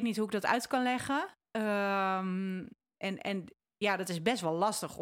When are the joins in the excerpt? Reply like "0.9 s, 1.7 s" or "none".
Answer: none